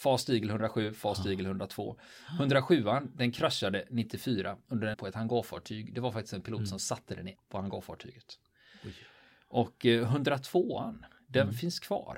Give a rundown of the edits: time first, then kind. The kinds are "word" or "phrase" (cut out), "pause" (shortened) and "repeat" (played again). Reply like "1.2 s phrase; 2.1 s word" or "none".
4.9 s word; 7.4 s word